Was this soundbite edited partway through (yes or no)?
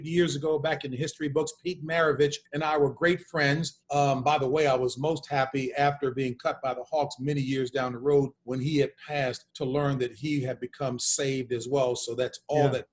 yes